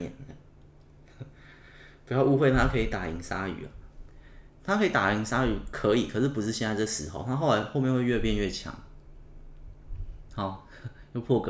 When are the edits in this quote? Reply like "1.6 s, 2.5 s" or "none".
none